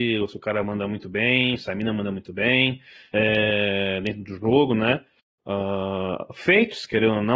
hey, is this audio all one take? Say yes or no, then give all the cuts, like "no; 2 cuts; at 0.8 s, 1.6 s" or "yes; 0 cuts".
yes; 0 cuts